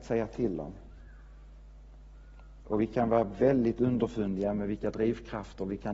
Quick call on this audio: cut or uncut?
uncut